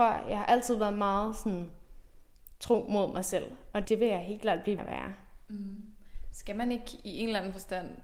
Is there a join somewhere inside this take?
yes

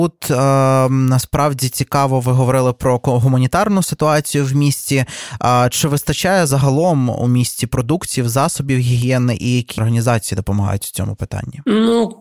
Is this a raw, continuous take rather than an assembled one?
no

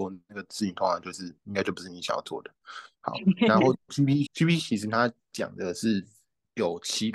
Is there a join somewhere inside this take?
yes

